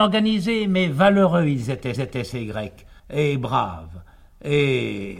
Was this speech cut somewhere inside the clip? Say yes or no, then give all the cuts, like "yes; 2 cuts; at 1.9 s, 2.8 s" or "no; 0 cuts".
yes; 2 cuts; at 2.0 s, 3.0 s